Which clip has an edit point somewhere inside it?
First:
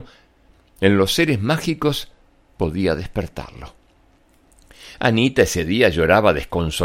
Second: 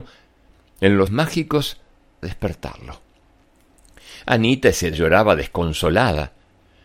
second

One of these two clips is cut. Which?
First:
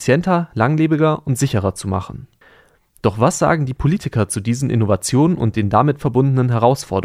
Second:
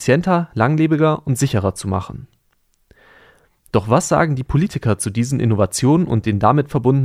first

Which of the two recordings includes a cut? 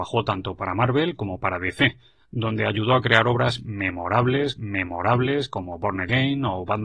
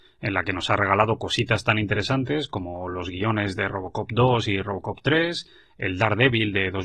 first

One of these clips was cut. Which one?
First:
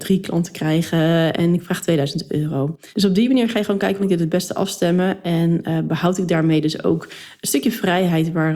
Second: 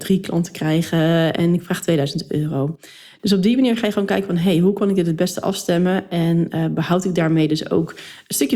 first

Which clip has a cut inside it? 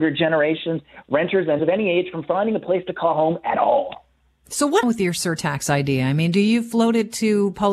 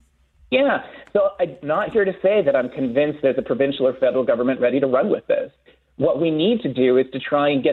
first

